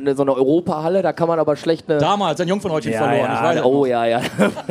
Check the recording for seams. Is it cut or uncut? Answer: cut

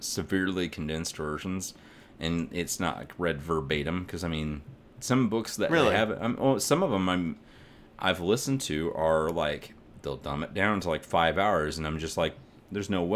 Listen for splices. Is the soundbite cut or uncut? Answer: uncut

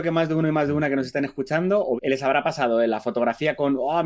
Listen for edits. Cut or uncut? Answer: cut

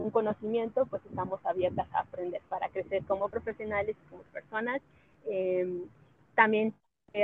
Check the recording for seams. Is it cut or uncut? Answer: uncut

